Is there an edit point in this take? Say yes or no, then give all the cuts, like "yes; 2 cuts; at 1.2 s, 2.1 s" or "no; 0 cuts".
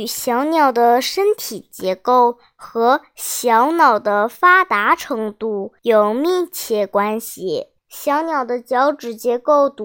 yes; 2 cuts; at 5.8 s, 7.8 s